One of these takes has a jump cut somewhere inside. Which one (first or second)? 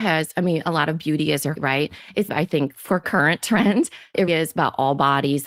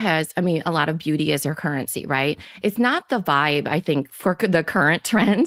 first